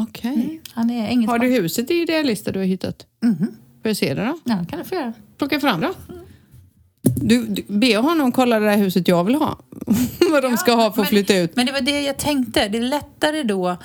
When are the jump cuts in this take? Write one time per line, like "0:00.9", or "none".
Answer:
0:05.8